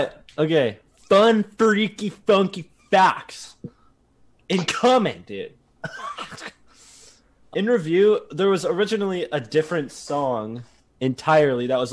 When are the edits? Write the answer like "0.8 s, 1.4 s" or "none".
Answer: 7.5 s